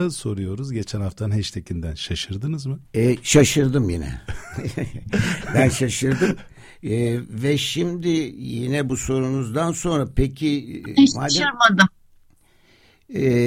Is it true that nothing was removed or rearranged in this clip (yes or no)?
no